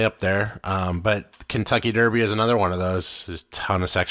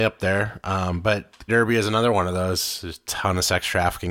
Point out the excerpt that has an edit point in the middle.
second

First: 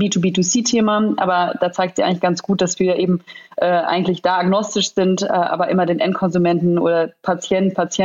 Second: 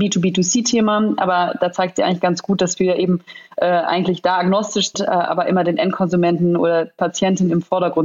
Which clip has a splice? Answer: second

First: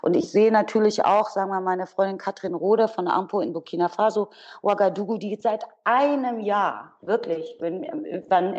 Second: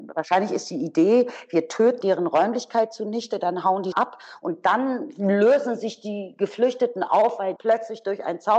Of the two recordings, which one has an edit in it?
second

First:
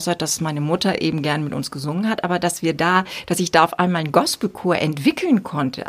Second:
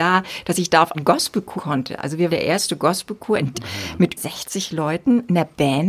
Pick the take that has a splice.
second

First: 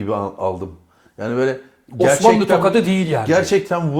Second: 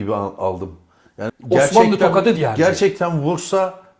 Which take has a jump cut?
second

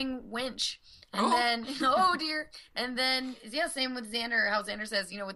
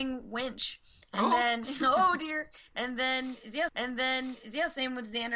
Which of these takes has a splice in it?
second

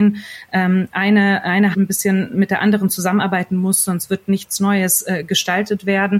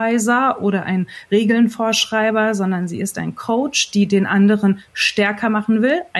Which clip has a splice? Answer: first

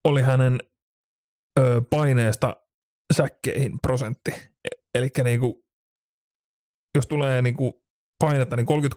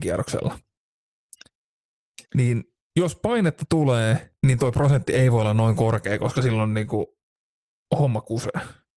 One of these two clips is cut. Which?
second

